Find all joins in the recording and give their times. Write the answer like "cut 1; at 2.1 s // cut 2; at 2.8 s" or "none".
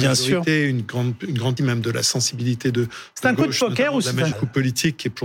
cut 1; at 1.6 s // cut 2; at 4.3 s

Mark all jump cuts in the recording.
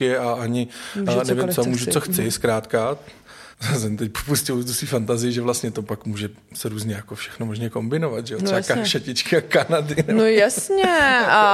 cut 1; at 3.5 s

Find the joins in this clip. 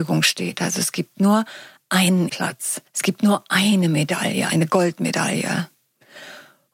cut 1; at 2.3 s // cut 2; at 2.9 s // cut 3; at 4.5 s

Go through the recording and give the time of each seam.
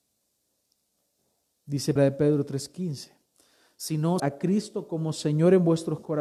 cut 1; at 2.0 s // cut 2; at 4.2 s

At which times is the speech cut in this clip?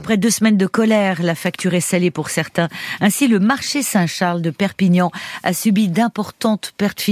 none

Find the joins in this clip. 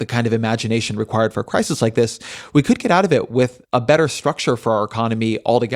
cut 1; at 3.6 s

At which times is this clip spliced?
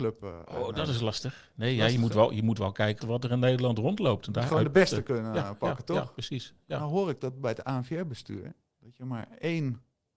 cut 1; at 3.0 s

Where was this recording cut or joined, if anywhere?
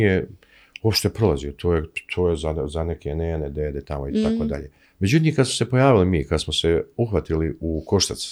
cut 1; at 4.8 s

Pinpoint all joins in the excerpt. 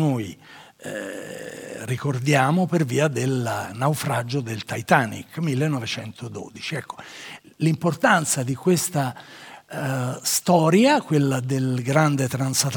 none

